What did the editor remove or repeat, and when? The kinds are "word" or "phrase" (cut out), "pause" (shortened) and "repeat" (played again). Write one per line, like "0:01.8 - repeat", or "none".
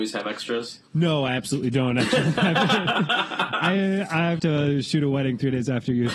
0:04.4 - phrase